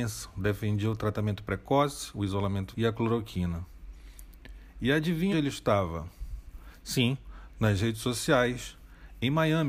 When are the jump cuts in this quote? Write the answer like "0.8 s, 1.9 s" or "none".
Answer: 2.7 s, 5.3 s